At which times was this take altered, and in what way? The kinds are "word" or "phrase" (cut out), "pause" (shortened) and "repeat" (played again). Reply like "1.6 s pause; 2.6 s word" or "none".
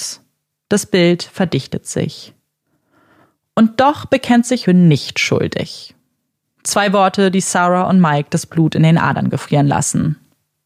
4.7 s phrase